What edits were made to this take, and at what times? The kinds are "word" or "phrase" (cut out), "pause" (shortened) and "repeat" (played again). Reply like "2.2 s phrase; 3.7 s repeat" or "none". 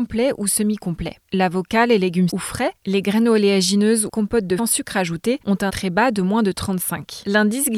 2.3 s word; 4.1 s phrase; 4.6 s phrase; 5.7 s word